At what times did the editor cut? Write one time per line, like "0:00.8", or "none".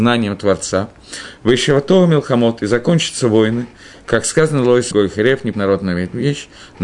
0:04.9
0:05.5